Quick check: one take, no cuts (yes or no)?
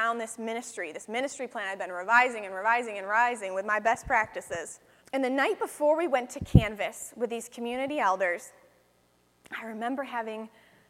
no